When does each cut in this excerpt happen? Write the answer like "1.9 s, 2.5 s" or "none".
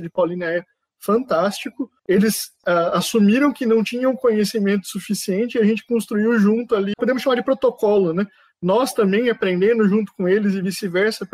2.0 s, 6.9 s